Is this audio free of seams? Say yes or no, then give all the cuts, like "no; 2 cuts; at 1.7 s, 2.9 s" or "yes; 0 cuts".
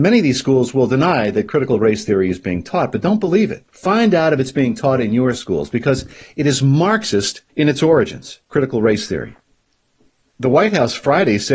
no; 2 cuts; at 3.7 s, 7.5 s